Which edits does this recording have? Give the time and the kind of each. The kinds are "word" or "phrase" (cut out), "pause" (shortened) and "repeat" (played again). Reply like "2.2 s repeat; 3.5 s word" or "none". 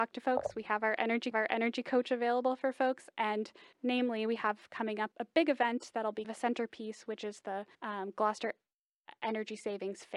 1.3 s repeat; 3.7 s pause; 5.1 s word; 6.2 s word; 7.7 s pause